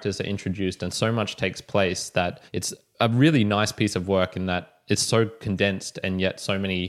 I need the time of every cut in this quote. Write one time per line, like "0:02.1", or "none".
0:02.5